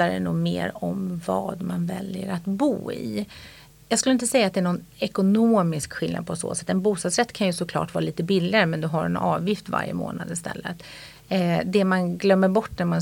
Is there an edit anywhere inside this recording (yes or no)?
no